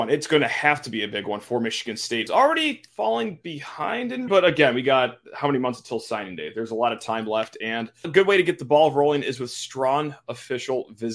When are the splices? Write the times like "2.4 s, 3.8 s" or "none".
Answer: 2.3 s, 2.9 s, 4.3 s, 8.0 s